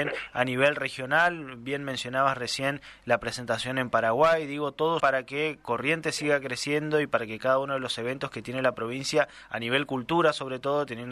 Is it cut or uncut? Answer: cut